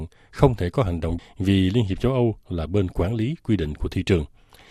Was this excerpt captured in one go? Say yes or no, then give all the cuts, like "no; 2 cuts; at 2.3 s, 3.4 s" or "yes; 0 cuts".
no; 1 cut; at 1.2 s